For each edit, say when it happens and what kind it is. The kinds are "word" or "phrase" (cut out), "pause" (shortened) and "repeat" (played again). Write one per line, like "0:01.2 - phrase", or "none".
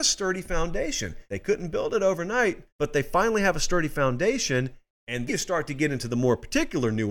0:01.2 - pause
0:02.7 - pause
0:05.3 - word